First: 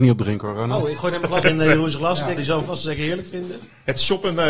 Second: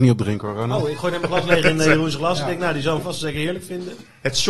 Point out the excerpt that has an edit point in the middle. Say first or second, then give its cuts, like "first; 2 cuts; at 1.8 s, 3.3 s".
first; 2 cuts; at 1.4 s, 2.4 s